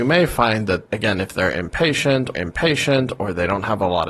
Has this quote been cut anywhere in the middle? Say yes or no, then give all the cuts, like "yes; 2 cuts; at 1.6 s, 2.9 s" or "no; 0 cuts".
yes; 1 cut; at 2.3 s